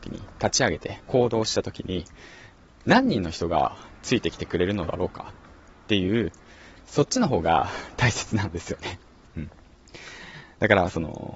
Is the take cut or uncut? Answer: uncut